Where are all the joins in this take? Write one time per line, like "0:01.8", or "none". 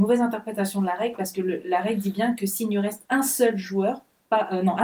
0:03.1